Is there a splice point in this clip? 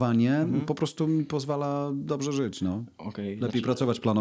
no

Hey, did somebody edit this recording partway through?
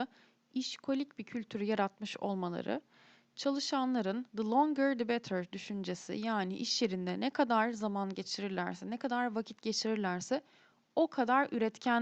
yes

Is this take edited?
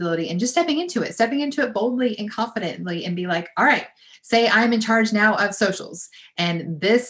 no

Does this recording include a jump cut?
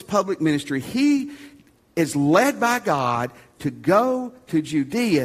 no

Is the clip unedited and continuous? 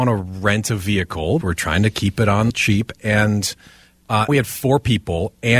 no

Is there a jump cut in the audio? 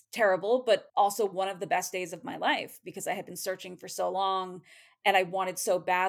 no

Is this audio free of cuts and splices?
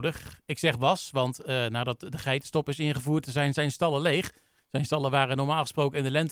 yes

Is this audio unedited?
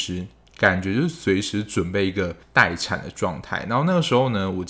no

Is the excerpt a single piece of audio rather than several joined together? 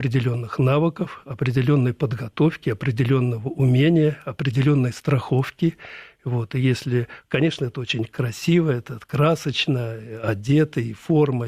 yes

